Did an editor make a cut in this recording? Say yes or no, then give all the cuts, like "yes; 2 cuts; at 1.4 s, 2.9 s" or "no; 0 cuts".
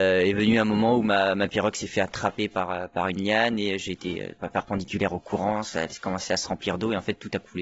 no; 0 cuts